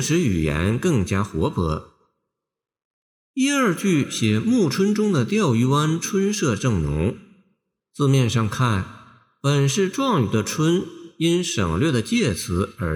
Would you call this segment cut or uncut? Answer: uncut